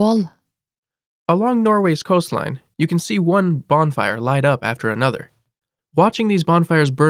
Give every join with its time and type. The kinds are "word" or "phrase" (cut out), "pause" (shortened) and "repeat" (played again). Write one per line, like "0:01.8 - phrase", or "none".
none